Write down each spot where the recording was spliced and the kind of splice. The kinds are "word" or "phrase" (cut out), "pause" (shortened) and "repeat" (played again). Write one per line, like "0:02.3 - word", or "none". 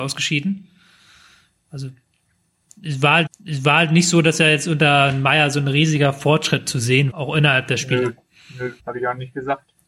0:03.3 - repeat
0:07.1 - word
0:08.8 - pause

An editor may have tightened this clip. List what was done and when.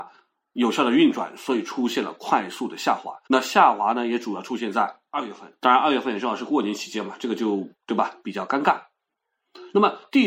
0:03.2 - pause
0:05.6 - pause

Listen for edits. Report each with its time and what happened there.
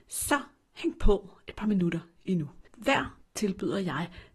0:03.2 - word

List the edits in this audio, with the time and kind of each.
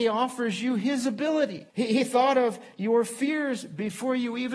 0:01.7 - pause

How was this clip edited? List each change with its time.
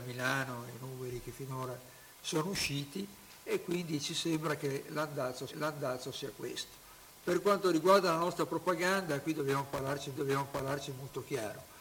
0:05.5 - repeat
0:10.1 - repeat

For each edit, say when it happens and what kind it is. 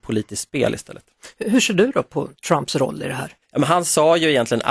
0:03.4 - pause

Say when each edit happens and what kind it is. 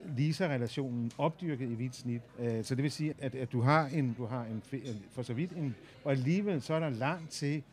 0:02.3 - pause
0:03.1 - word
0:04.2 - word
0:05.9 - word

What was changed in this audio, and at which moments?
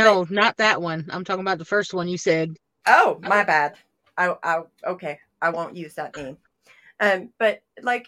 0:02.6 - pause
0:04.0 - pause

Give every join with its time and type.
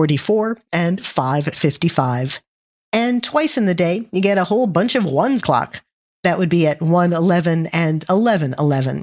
0:05.4 - phrase

